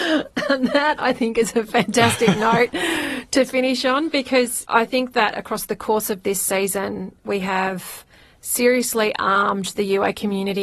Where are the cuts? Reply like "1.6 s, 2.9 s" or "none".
none